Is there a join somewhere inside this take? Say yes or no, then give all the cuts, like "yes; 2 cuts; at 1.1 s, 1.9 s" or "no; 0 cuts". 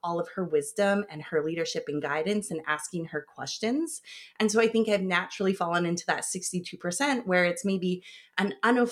no; 0 cuts